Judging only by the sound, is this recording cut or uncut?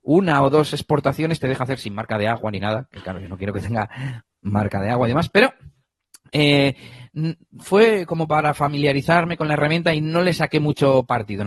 uncut